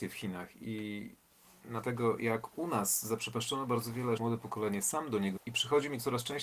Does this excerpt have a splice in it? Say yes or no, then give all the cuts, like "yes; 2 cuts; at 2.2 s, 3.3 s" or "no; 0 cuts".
yes; 3 cuts; at 1.8 s, 4.2 s, 5.4 s